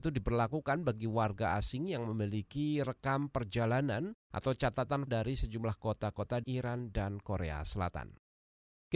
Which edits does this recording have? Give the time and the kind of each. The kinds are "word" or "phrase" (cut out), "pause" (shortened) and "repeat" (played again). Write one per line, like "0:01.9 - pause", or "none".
0:05.1 - word
0:06.4 - phrase